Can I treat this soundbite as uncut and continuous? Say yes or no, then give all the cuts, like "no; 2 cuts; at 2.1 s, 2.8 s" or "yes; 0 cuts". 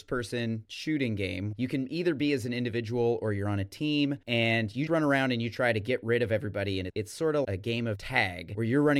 no; 3 cuts; at 4.9 s, 6.9 s, 7.4 s